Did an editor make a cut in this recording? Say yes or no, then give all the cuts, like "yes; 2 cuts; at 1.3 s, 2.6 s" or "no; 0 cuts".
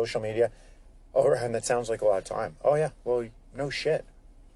no; 0 cuts